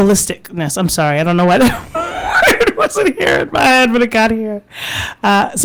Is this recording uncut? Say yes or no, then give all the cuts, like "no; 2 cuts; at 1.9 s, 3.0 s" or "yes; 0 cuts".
yes; 0 cuts